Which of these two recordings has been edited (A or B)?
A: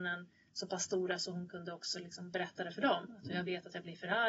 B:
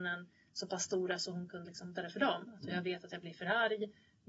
B